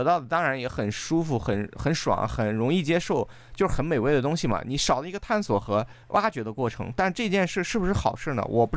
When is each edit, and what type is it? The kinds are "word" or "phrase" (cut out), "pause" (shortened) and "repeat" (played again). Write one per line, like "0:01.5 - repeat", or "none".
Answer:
0:06.0 - pause

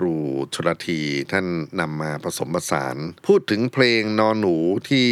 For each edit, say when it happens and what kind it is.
0:03.2 - pause

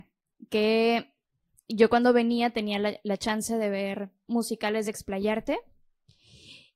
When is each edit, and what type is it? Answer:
none

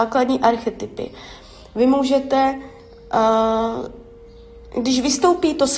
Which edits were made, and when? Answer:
none

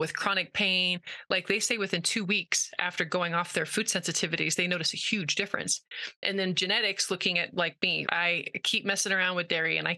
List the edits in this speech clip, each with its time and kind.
0:08.0 - word

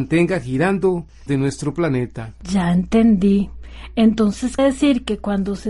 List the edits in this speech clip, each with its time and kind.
0:01.3 - word
0:04.6 - word

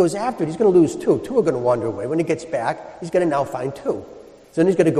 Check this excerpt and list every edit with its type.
none

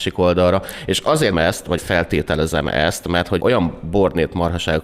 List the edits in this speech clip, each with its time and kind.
0:01.3 - word
0:01.8 - word
0:03.4 - word

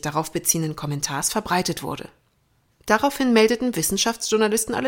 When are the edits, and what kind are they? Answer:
none

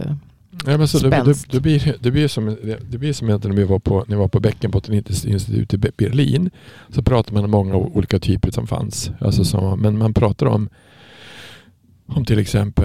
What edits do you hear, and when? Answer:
0:08.5 - phrase

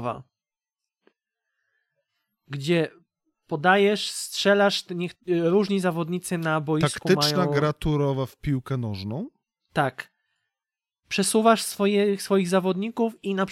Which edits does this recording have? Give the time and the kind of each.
none

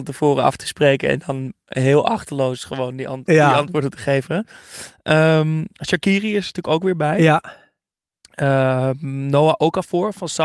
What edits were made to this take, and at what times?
none

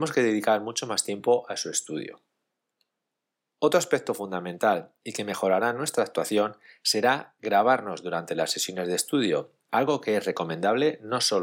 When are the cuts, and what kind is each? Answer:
none

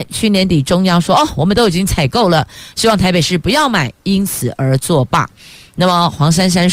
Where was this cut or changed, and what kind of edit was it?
none

